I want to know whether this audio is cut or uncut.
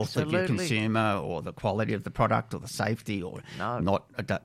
uncut